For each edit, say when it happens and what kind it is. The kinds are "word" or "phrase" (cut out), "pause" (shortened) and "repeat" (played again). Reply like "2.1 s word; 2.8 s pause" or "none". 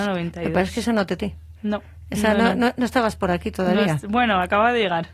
1.2 s phrase